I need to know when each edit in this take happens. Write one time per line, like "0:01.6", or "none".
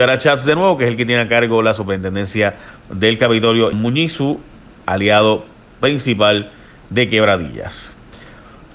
0:03.7